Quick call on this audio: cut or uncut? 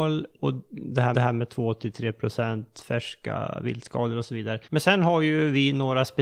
cut